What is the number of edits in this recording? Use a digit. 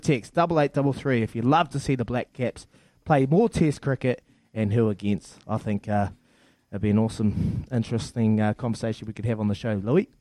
0